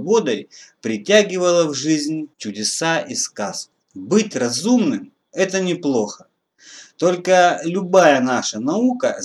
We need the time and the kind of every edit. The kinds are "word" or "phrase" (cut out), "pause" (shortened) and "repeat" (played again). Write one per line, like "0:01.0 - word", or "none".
0:02.3 - pause

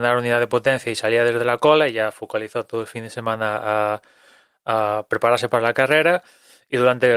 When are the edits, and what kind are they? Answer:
none

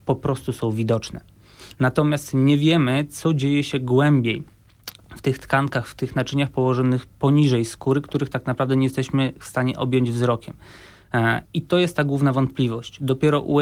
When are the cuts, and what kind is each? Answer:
0:11.4 - pause

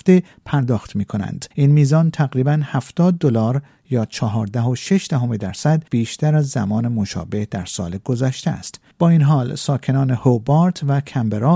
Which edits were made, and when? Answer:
0:01.5 - pause
0:05.9 - pause
0:08.9 - pause

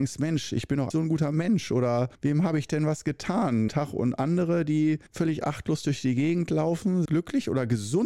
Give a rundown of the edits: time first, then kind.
0:00.9 - word
0:02.1 - pause
0:03.7 - word
0:05.1 - pause
0:07.1 - word

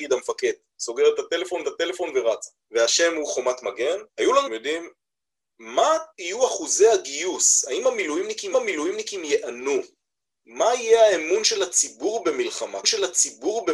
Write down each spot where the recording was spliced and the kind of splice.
0:01.6 - repeat
0:04.1 - pause
0:04.5 - phrase
0:06.1 - pause
0:08.5 - repeat
0:12.8 - repeat

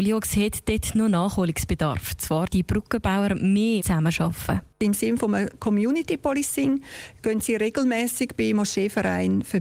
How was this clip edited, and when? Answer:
0:02.5 - word
0:03.8 - phrase

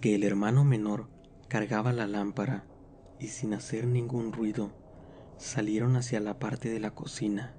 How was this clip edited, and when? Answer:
none

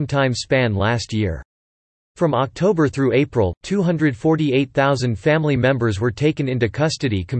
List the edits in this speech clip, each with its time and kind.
none

